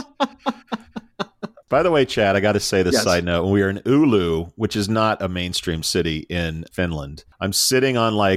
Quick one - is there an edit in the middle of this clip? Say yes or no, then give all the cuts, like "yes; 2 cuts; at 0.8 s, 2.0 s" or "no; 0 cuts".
no; 0 cuts